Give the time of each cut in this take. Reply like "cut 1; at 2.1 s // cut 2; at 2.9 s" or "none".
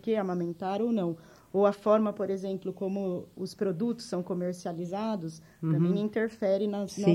none